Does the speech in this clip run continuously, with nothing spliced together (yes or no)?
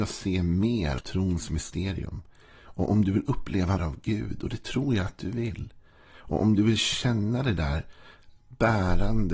no